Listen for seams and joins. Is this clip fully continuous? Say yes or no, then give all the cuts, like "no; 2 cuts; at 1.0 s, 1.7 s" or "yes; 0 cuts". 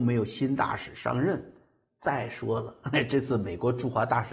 yes; 0 cuts